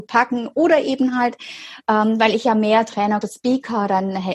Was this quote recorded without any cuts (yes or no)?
no